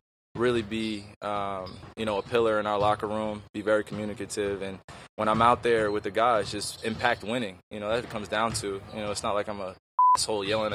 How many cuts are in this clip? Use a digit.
1